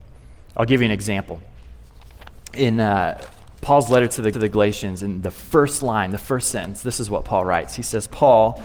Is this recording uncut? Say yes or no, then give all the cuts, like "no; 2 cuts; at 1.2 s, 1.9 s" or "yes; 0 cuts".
no; 1 cut; at 4.3 s